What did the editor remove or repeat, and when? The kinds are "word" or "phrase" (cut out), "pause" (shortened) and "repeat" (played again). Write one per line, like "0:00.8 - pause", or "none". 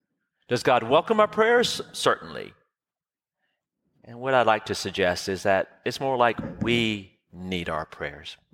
none